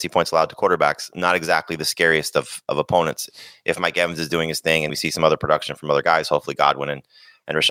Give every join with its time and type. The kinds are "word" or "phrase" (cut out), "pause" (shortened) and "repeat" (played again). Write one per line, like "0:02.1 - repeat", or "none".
0:04.9 - word